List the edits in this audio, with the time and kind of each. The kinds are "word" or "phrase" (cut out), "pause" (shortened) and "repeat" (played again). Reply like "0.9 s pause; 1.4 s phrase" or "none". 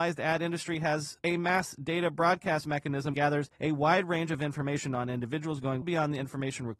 1.2 s word; 3.1 s word; 3.5 s pause; 5.8 s word